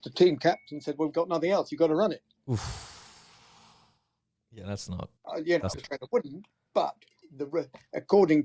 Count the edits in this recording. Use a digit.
4